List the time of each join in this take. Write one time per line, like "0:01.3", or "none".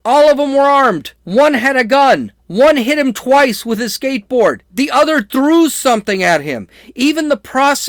0:01.2
0:02.4
0:04.6